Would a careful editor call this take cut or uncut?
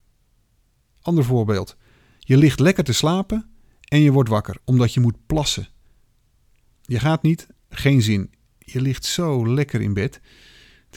uncut